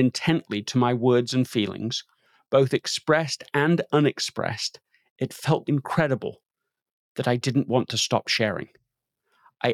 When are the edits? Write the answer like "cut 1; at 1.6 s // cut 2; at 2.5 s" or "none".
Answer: cut 1; at 5.6 s